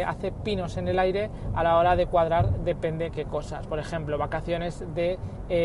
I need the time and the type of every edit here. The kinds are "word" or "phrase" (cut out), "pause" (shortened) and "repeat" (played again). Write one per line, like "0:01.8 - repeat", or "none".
none